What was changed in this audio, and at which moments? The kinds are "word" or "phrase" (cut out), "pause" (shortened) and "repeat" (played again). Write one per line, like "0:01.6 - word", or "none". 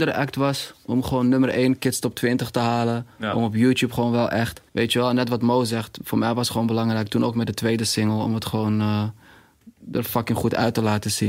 0:04.7 - pause